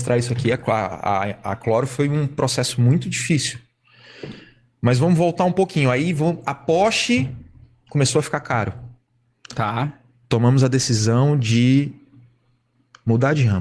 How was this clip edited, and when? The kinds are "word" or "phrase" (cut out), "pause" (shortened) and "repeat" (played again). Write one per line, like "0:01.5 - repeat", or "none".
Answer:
none